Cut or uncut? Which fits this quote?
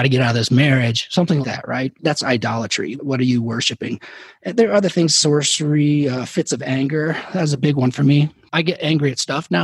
cut